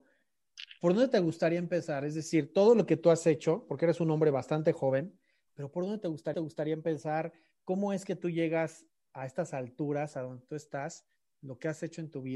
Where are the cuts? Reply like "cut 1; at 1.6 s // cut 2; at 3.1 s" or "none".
cut 1; at 6.3 s

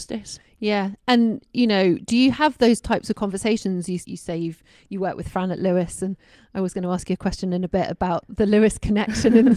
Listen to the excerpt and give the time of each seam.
cut 1; at 4.0 s

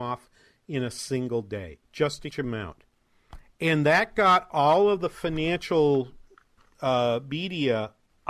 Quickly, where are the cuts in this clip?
cut 1; at 1.8 s // cut 2; at 2.3 s

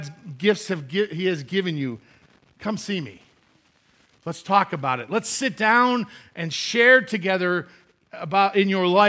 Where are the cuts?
none

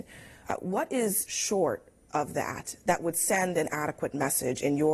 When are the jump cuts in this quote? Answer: cut 1; at 1.3 s

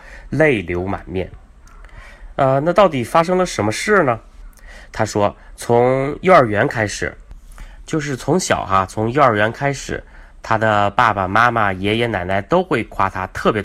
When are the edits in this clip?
none

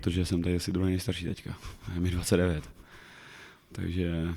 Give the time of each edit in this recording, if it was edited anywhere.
none

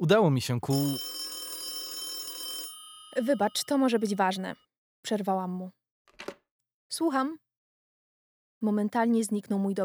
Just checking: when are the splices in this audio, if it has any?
none

